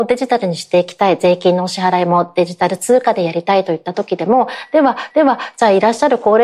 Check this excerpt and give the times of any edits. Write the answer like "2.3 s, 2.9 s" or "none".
5.1 s

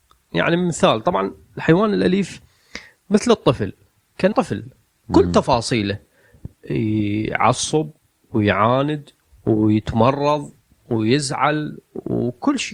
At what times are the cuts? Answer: 4.3 s

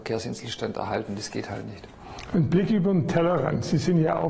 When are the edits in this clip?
none

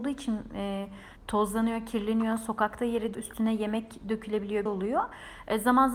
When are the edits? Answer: 1.2 s, 3.1 s, 4.7 s

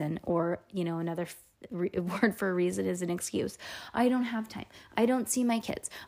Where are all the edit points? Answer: none

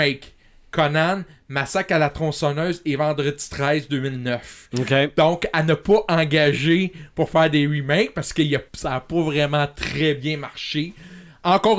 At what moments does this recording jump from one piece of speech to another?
8.7 s

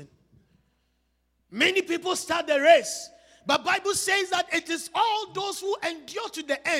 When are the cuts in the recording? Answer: none

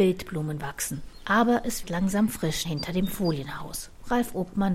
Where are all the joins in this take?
1.8 s, 2.6 s

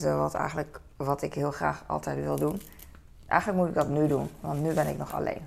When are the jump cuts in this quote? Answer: none

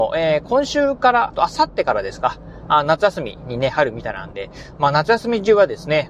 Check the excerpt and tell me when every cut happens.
1.3 s

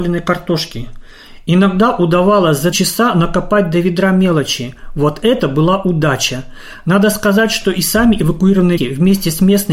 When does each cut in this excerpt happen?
2.7 s, 8.8 s

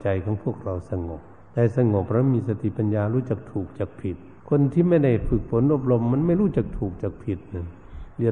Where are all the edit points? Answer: 1.4 s, 4.4 s

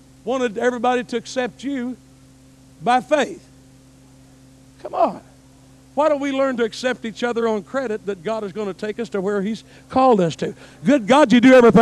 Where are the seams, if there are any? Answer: none

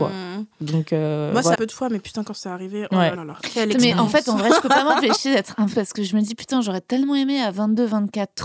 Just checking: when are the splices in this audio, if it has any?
1.5 s, 3.2 s, 5.7 s

